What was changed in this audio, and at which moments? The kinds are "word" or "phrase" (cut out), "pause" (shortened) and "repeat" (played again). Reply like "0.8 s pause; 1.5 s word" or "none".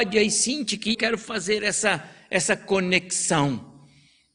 0.9 s word